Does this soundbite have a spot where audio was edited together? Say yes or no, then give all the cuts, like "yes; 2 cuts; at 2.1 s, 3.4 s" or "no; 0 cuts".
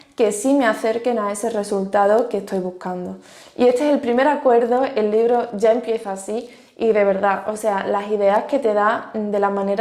no; 0 cuts